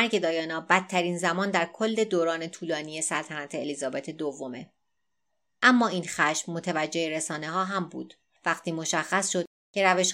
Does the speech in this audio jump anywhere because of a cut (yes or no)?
no